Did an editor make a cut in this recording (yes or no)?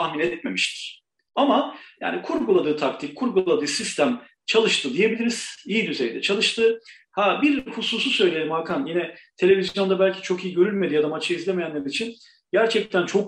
no